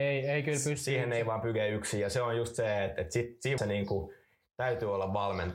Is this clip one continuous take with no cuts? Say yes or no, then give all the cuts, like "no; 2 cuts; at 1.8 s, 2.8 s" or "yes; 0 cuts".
no; 1 cut; at 3.6 s